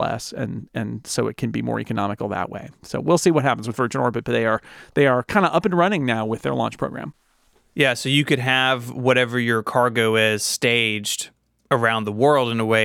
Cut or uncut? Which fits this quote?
uncut